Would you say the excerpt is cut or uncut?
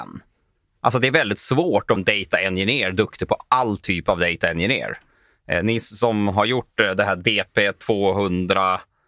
cut